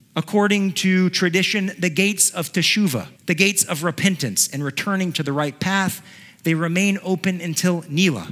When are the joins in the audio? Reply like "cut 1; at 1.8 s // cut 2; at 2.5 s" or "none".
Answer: cut 1; at 3.2 s